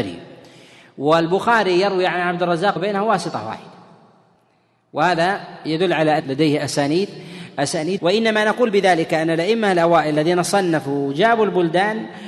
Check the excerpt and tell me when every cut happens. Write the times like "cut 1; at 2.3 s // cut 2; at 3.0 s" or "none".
cut 1; at 2.8 s // cut 2; at 6.2 s // cut 3; at 8.0 s